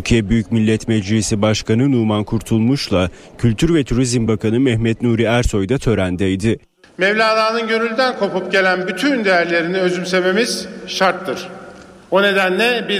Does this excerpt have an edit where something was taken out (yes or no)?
no